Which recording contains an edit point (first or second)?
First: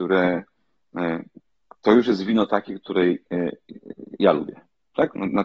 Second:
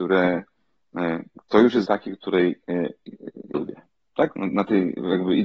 second